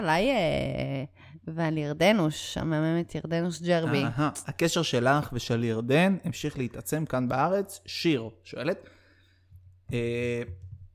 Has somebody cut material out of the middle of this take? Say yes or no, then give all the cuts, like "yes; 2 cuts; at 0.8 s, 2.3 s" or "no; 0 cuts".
no; 0 cuts